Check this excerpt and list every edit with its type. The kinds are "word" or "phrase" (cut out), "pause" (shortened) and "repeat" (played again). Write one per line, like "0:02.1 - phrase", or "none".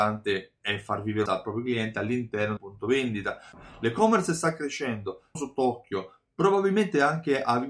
0:01.3 - word
0:02.6 - word
0:05.3 - word